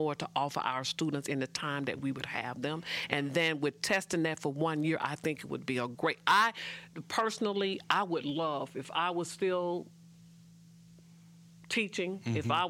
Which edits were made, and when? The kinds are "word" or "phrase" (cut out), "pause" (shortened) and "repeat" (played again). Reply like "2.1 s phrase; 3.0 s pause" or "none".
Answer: none